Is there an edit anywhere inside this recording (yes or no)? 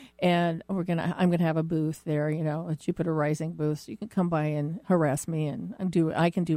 no